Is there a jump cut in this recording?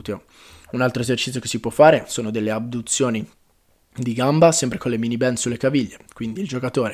no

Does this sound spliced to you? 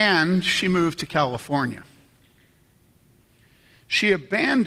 no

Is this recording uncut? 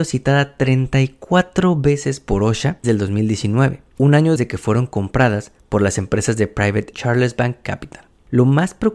no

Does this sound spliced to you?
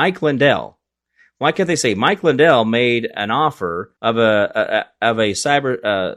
yes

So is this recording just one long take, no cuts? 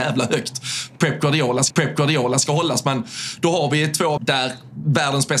no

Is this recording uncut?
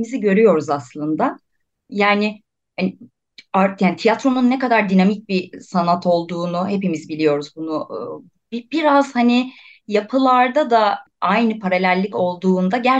yes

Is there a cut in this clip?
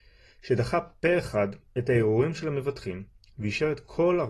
no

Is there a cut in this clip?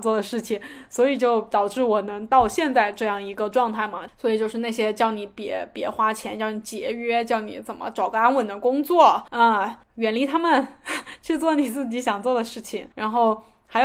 yes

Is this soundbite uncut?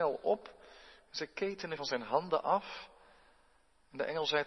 no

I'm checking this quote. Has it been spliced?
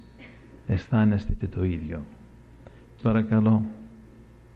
yes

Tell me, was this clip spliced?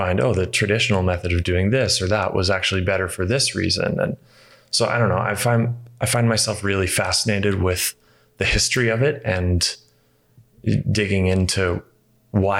no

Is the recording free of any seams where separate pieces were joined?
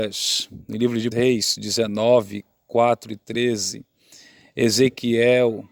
no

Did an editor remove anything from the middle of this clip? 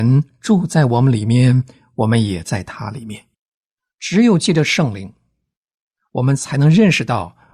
yes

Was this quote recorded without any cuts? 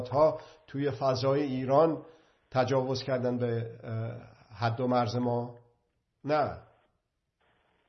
yes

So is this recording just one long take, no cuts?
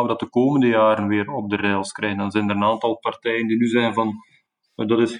yes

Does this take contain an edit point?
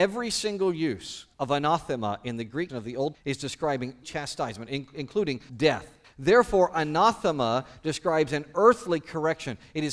yes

